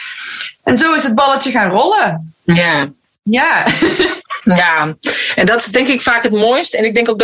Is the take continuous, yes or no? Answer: yes